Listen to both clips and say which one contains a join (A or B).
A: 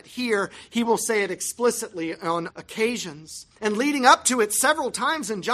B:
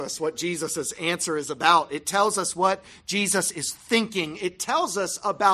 A